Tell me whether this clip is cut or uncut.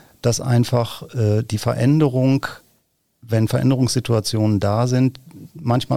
uncut